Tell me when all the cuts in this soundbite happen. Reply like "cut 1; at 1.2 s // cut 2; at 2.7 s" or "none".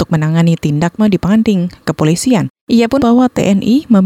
cut 1; at 1.0 s // cut 2; at 3.0 s